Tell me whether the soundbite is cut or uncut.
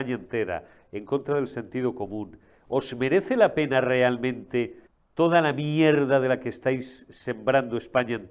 cut